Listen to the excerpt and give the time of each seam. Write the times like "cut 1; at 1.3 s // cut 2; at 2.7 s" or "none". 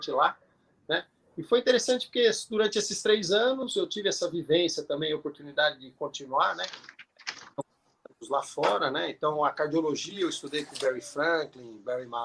none